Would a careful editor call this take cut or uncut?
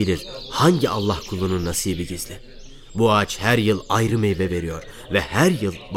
uncut